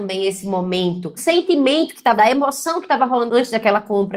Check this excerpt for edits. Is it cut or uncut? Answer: cut